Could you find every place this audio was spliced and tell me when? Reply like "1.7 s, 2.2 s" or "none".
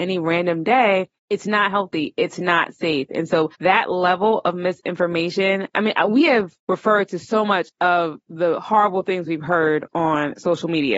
1.2 s, 3.5 s, 6.6 s